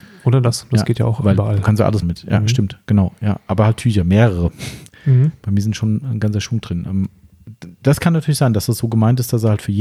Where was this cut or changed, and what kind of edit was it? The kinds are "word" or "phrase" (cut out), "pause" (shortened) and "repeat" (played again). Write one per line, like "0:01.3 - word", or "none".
0:02.0 - word